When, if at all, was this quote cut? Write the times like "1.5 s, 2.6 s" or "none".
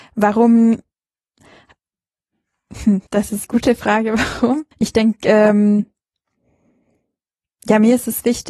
3.1 s, 3.4 s, 4.7 s